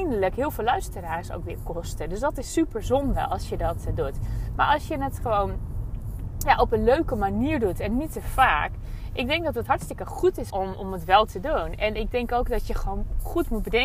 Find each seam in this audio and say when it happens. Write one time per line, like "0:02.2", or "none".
0:10.5